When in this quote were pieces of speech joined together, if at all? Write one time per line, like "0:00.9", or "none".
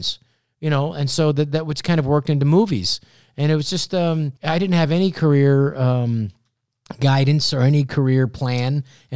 0:04.4